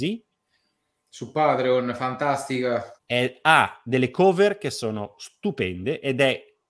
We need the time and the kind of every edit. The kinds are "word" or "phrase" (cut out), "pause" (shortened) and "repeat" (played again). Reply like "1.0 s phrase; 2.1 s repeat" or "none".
3.0 s pause

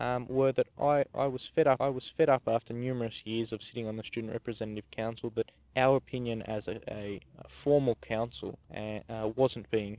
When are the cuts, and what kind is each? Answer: 1.8 s repeat; 8.6 s pause

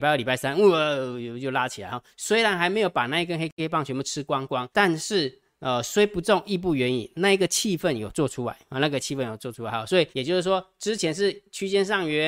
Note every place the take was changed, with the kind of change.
4.7 s pause; 10.1 s pause

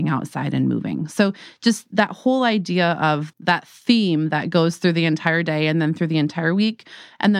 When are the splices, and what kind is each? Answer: none

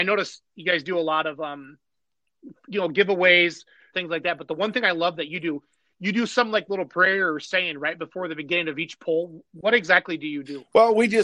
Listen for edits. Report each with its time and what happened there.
3.9 s phrase

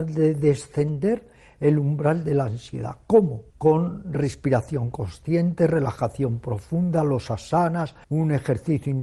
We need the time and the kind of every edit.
3.5 s pause; 8.0 s pause

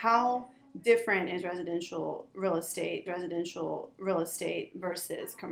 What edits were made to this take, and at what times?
3.1 s repeat

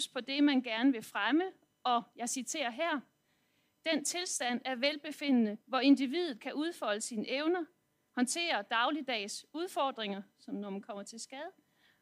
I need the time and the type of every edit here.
5.6 s pause

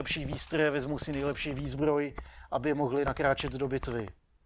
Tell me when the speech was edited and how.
none

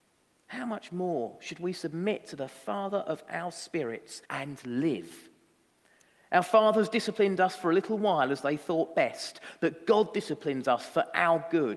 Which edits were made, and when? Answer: 4.3 s pause

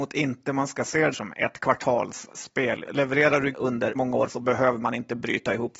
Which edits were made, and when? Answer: 1.1 s word; 2.9 s word; 3.5 s word; 3.9 s word; 4.3 s word

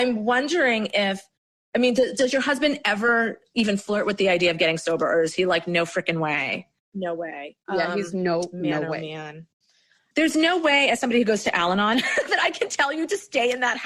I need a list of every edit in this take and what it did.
none

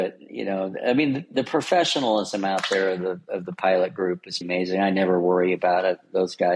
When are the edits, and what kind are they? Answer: 4.4 s word

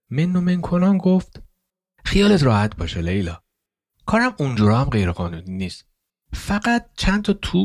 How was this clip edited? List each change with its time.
none

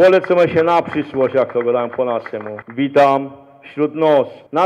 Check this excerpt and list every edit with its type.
none

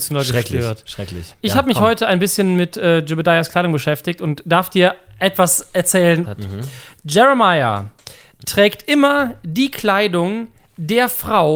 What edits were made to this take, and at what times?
6.2 s phrase

